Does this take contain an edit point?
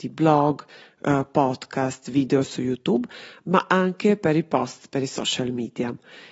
no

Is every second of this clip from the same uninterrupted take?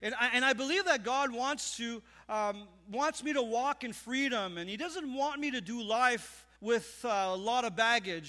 no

